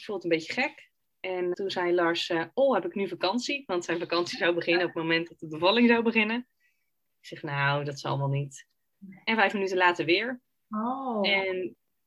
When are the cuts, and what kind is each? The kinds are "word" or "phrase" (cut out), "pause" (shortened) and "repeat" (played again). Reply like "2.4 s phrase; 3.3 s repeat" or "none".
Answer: 1.5 s word